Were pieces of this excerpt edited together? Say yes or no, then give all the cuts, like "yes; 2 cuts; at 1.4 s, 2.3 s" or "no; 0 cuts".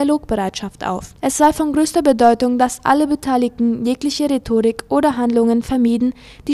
yes; 1 cut; at 1.2 s